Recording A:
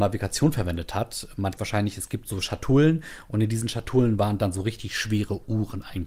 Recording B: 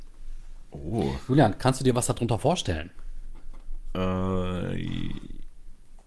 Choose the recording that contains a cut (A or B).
A